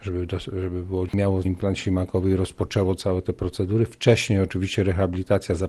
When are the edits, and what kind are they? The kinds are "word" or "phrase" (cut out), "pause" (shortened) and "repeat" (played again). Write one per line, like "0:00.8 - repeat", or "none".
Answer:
0:01.1 - word
0:01.4 - word